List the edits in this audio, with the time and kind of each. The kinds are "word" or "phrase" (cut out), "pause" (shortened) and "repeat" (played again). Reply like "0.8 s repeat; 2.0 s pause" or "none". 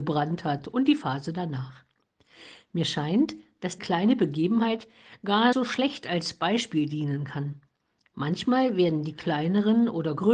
3.8 s word; 5.5 s word

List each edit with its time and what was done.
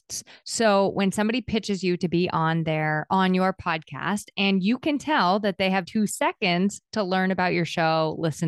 5.8 s phrase

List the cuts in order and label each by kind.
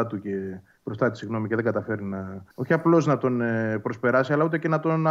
2.5 s pause

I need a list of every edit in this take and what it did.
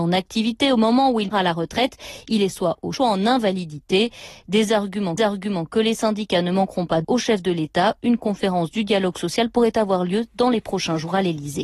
1.3 s word; 2.9 s word; 5.2 s repeat; 7.0 s word

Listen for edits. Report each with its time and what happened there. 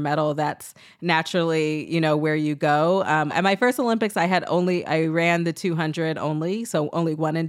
3.3 s word

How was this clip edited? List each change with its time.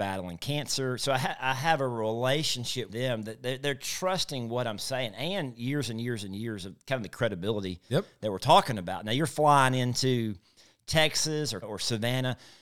2.9 s word; 11.6 s word

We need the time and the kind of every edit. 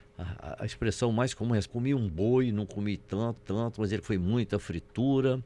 1.7 s phrase; 3.4 s repeat; 4.0 s word

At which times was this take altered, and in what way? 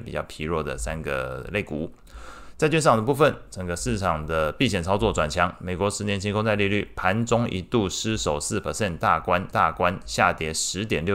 9.5 s repeat

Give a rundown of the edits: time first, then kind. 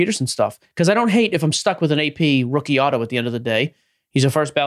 none

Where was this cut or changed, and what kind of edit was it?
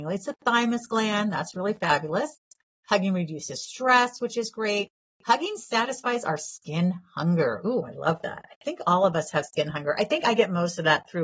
none

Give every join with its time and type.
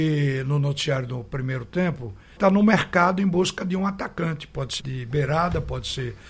2.4 s phrase; 4.8 s word

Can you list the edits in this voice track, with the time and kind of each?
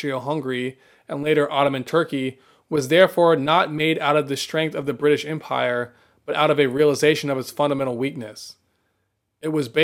none

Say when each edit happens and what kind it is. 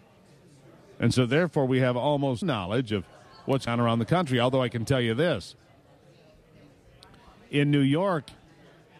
2.4 s word; 3.7 s word

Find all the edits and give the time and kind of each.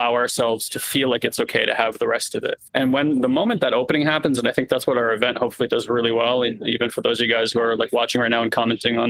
2.7 s pause

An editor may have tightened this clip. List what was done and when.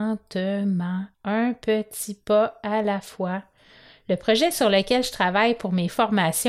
1.1 s pause

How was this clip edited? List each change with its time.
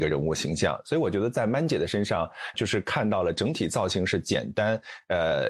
2.5 s word

